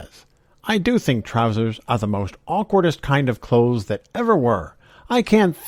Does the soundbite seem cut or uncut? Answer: uncut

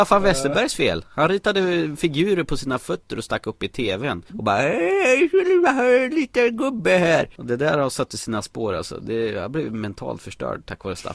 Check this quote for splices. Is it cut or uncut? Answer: uncut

